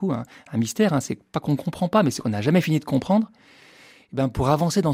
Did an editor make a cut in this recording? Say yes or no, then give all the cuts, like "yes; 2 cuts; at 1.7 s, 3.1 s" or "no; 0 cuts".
no; 0 cuts